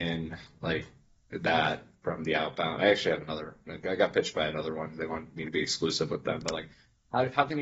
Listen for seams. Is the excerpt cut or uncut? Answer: uncut